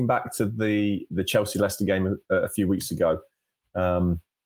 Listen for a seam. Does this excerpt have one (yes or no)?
no